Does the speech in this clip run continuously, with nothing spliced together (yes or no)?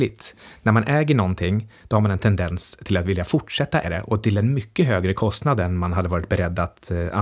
no